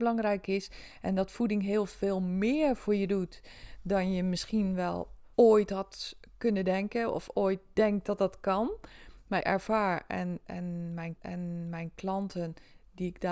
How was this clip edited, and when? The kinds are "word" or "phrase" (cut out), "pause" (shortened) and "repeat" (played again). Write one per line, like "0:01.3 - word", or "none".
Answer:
0:05.3 - pause
0:09.4 - word
0:11.2 - repeat